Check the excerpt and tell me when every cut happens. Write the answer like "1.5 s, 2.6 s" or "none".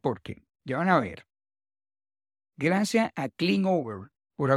none